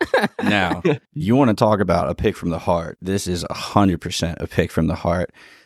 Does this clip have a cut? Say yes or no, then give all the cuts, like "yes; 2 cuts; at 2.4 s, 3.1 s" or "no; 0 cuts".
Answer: yes; 1 cut; at 1.0 s